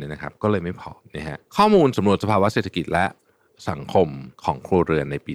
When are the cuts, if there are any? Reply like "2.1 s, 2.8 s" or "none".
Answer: 1.0 s, 1.4 s, 4.3 s